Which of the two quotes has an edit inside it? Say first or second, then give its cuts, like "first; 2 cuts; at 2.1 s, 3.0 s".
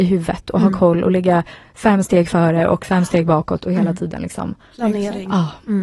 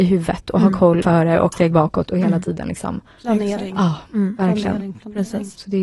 second; 2 cuts; at 1.0 s, 1.5 s